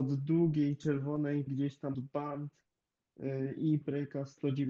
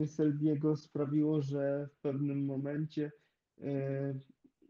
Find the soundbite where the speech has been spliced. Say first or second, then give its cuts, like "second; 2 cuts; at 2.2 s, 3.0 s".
first; 3 cuts; at 1.5 s, 1.9 s, 3.8 s